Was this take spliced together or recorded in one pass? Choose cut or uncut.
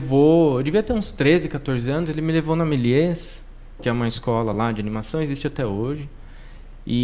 uncut